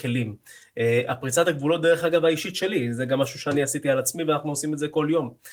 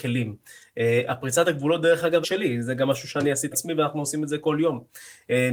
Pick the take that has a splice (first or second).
second